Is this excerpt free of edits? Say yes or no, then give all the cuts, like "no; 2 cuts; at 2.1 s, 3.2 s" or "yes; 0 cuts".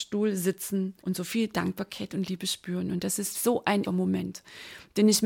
no; 3 cuts; at 1.0 s, 3.3 s, 3.8 s